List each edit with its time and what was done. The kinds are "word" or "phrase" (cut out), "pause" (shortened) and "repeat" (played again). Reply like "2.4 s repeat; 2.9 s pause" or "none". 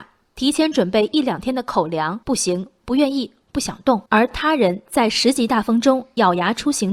2.2 s pause; 4.1 s pause